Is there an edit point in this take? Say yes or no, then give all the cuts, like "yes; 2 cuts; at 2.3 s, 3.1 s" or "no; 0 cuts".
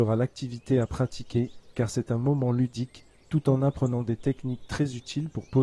no; 0 cuts